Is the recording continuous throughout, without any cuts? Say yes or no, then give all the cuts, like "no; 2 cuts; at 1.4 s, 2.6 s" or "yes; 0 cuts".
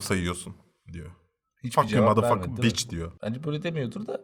yes; 0 cuts